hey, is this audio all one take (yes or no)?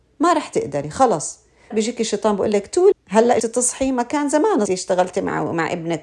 no